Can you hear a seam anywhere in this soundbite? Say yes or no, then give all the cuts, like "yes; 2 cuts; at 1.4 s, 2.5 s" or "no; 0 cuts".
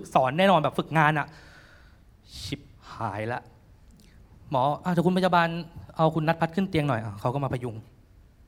no; 0 cuts